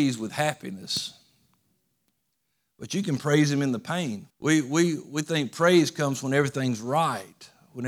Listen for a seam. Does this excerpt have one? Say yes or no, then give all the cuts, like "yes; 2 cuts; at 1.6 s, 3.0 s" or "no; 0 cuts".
yes; 1 cut; at 4.3 s